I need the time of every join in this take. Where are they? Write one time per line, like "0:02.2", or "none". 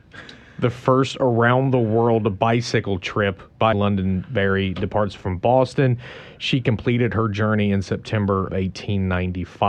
0:03.7
0:08.5